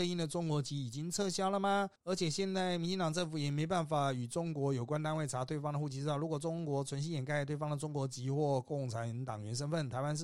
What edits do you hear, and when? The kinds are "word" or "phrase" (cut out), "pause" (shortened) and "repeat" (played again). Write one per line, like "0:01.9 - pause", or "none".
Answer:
0:02.0 - pause